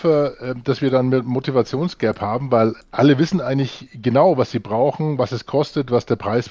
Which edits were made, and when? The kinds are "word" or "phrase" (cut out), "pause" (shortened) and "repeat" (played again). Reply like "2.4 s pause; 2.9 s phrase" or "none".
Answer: 2.8 s word